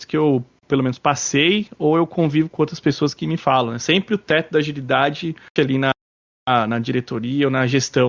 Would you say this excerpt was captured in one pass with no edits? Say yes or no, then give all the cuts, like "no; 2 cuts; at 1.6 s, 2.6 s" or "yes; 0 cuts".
no; 1 cut; at 5.6 s